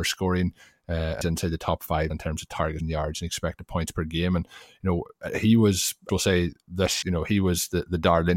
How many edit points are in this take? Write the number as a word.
five